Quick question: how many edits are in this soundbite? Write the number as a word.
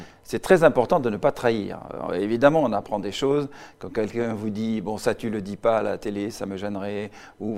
zero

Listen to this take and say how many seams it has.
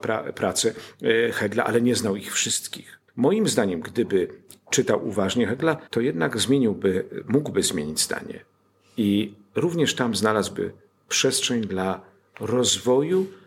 two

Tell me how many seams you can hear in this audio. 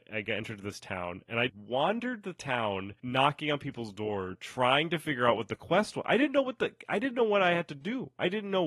one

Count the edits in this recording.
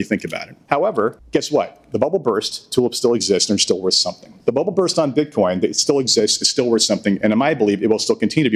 zero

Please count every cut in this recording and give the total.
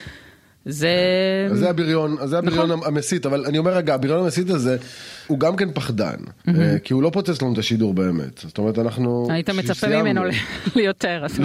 two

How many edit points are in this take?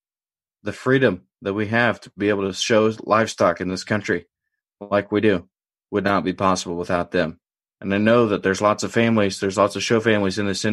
zero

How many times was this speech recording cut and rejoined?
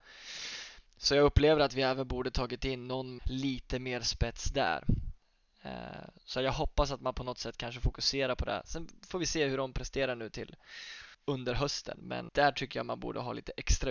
three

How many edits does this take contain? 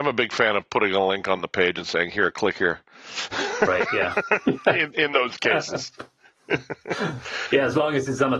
zero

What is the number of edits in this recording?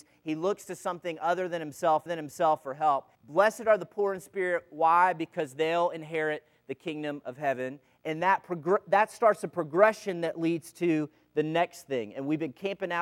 two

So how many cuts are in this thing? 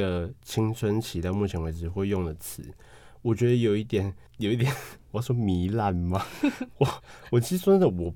one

